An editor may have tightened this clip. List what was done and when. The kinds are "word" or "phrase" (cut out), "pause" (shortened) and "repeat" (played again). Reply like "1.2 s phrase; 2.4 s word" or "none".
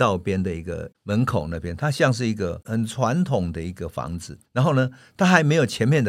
1.0 s pause; 4.5 s pause